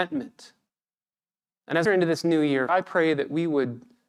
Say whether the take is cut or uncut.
cut